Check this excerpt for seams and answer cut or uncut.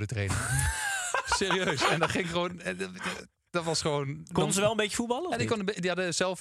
uncut